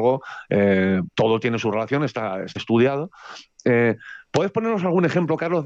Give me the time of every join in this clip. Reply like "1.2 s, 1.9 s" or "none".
1.1 s, 2.6 s